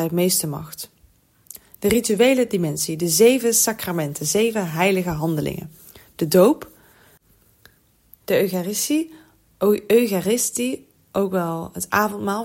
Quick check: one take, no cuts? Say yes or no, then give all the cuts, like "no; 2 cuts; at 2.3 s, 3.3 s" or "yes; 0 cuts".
yes; 0 cuts